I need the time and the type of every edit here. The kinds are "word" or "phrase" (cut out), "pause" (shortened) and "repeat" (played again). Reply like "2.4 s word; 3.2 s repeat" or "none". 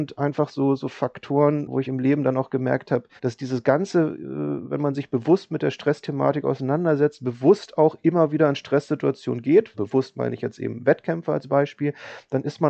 3.2 s pause; 9.7 s word